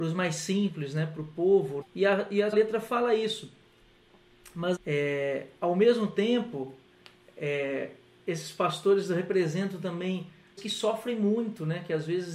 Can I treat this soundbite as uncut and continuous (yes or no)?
no